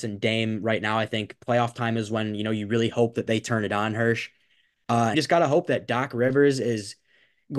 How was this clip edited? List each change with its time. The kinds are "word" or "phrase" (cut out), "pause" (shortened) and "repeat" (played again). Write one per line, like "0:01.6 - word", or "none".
0:05.1 - phrase

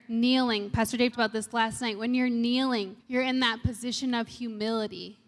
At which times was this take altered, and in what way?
0:01.1 - word
0:03.0 - pause

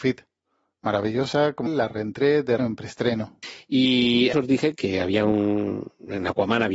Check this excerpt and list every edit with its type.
0:01.7 - word
0:02.6 - word
0:04.3 - word
0:04.7 - word

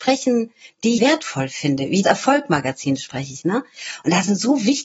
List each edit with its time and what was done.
0:01.0 - word
0:02.0 - word

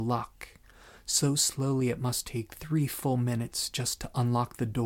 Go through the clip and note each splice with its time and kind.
none

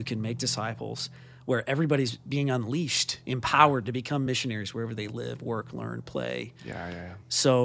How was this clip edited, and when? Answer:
none

